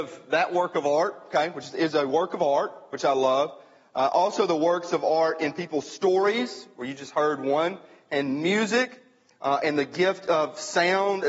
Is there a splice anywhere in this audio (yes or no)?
no